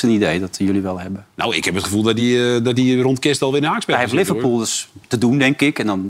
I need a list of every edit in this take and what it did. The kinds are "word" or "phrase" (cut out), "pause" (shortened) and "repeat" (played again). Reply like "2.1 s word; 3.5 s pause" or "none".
none